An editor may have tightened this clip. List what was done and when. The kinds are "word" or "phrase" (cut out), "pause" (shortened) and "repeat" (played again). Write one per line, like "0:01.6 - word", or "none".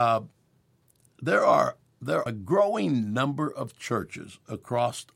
0:02.3 - word